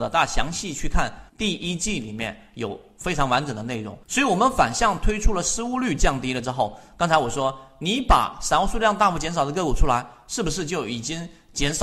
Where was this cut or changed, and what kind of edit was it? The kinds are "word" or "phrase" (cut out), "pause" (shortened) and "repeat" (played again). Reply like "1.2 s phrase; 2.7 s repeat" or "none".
1.3 s pause; 4.0 s pause